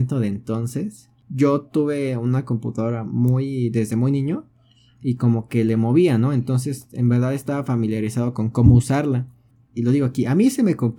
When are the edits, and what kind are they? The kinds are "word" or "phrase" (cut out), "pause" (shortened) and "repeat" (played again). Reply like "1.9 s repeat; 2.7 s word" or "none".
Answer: none